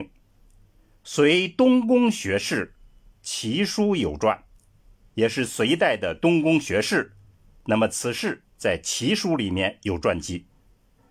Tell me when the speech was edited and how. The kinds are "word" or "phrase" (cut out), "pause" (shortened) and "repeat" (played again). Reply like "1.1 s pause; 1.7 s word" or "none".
none